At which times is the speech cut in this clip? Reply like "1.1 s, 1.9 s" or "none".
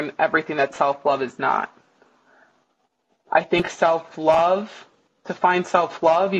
none